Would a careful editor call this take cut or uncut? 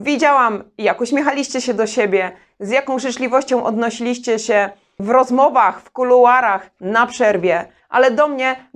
uncut